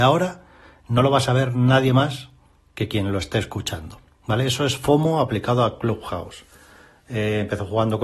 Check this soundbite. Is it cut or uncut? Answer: uncut